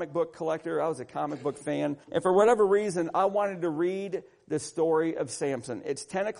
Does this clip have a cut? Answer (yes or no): yes